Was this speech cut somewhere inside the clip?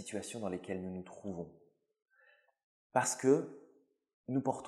no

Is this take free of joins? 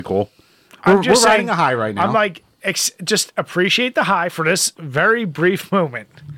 yes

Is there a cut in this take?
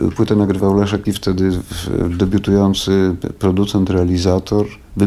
yes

